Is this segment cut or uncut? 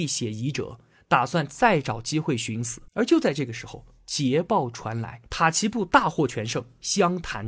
cut